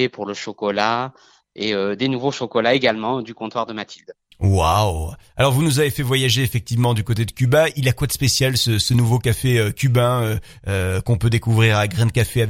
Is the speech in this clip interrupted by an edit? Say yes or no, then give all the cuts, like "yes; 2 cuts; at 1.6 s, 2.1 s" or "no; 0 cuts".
no; 0 cuts